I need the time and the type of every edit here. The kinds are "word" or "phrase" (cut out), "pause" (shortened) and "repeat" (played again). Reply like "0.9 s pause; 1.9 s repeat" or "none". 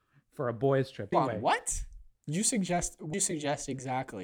1.1 s word; 3.1 s word